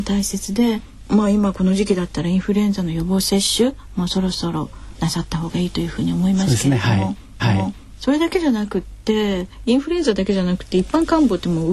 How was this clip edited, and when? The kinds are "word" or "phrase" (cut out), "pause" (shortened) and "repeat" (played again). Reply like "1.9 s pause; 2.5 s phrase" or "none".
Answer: 7.4 s repeat